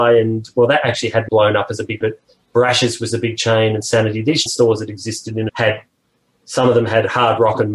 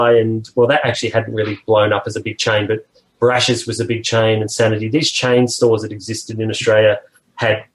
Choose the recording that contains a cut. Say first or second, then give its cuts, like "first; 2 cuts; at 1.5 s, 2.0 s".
first; 4 cuts; at 1.3 s, 2.0 s, 4.5 s, 5.5 s